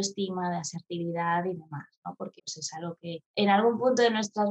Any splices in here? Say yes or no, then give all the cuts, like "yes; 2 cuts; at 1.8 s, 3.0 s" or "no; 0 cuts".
yes; 2 cuts; at 2.4 s, 3.3 s